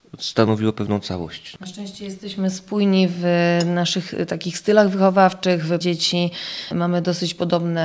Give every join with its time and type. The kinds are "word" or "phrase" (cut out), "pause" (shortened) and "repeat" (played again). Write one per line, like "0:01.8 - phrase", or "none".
0:05.8 - phrase

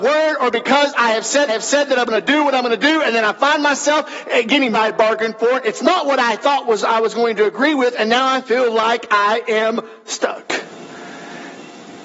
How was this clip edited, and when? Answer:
0:01.5 - repeat
0:04.7 - phrase

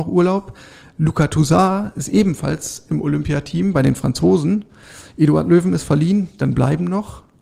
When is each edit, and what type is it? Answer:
none

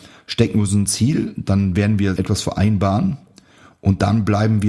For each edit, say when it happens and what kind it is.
0:02.2 - word

